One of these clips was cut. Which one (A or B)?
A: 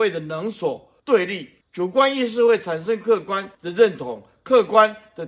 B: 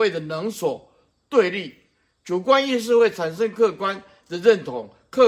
A